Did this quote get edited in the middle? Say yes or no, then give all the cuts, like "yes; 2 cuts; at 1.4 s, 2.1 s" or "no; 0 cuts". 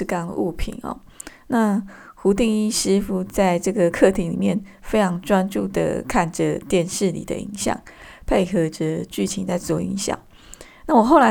no; 0 cuts